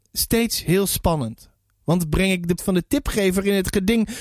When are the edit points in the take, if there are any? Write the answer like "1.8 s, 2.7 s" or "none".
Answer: 2.6 s